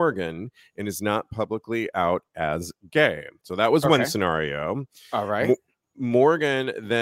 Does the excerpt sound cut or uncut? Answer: uncut